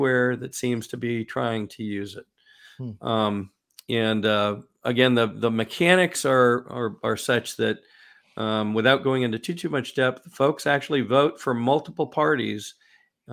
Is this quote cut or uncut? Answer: uncut